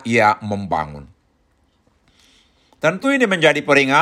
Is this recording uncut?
yes; 0 cuts

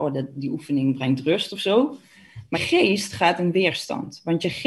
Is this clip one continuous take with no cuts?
no; 1 cut; at 2.5 s

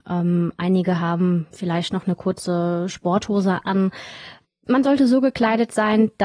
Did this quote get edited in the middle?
no; 0 cuts

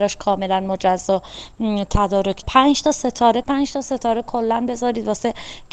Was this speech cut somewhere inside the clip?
yes; 2 cuts; at 2.4 s, 3.4 s

